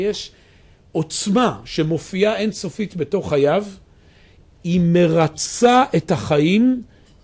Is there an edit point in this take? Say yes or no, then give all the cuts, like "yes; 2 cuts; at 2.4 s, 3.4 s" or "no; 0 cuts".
no; 0 cuts